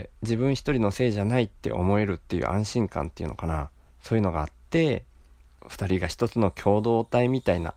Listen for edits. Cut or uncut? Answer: cut